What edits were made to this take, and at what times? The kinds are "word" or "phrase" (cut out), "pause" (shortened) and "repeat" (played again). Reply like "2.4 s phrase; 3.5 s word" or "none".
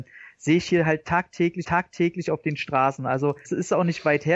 1.6 s repeat; 3.4 s phrase